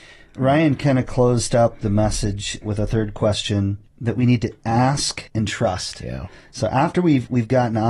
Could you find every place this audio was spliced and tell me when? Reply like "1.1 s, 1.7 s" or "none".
2.6 s, 3.9 s, 5.3 s